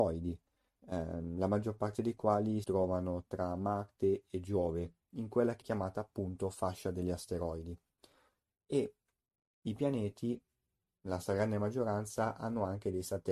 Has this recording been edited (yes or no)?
yes